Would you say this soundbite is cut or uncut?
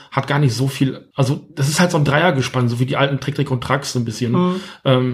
cut